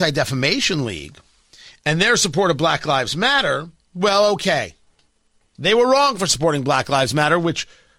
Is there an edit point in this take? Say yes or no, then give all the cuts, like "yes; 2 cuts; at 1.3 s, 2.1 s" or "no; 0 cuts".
no; 0 cuts